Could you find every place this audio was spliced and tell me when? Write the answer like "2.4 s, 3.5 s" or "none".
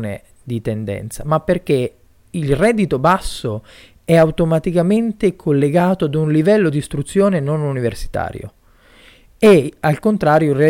none

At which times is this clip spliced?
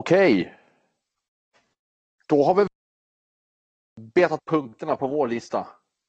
4.4 s

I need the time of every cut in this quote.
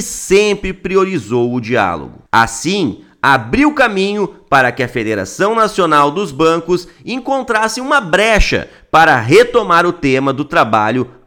none

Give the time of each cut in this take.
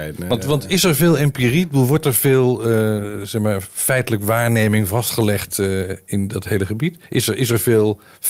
none

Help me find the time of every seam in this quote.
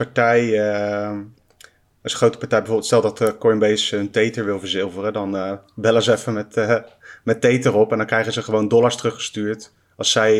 none

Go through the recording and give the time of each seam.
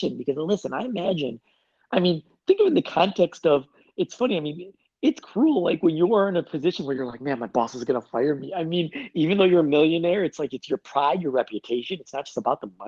none

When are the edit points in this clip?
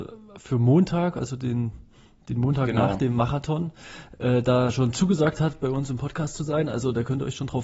none

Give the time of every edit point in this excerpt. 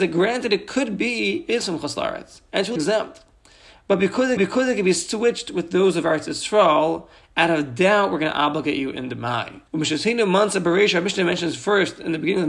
1.5 s, 2.8 s, 4.4 s, 9.7 s

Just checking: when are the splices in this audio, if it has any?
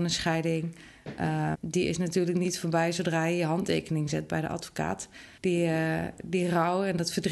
1.5 s, 5.4 s

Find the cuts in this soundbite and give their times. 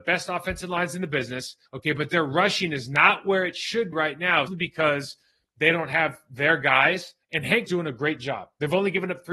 1.7 s, 3.9 s, 4.5 s, 7.2 s, 7.7 s

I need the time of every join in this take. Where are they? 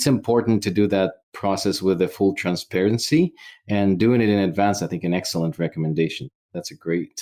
1.2 s

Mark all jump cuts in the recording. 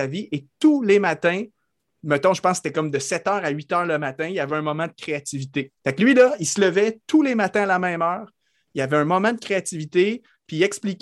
5.8 s

